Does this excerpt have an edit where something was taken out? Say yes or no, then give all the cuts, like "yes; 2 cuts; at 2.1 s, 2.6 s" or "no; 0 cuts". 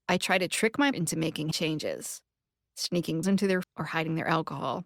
yes; 4 cuts; at 0.9 s, 1.5 s, 3.2 s, 3.6 s